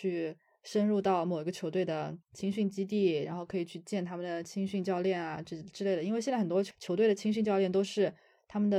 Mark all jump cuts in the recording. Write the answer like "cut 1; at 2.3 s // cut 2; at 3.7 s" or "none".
cut 1; at 2.2 s